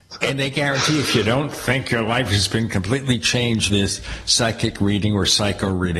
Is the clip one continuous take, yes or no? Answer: no